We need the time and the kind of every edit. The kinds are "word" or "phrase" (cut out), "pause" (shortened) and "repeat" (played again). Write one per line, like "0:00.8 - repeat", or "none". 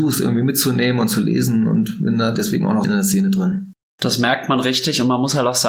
0:02.8 - phrase
0:03.9 - pause